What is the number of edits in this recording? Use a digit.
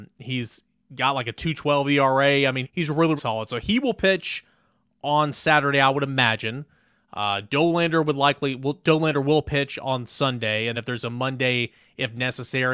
3